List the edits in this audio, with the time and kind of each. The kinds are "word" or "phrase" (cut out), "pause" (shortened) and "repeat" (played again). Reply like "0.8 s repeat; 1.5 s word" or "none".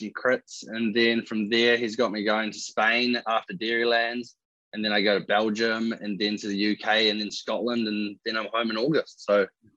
none